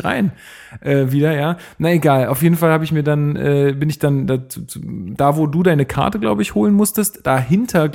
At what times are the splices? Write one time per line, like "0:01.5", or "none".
none